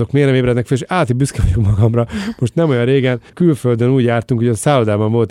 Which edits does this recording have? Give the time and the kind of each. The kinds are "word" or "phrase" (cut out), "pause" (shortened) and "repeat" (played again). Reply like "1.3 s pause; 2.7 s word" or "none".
3.3 s pause